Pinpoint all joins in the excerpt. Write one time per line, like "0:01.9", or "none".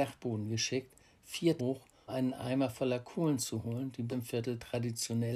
0:01.6
0:02.1
0:04.1

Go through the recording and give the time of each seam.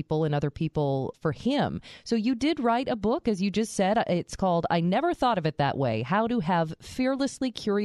0:01.1

